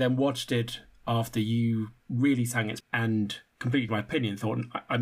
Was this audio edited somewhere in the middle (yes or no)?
yes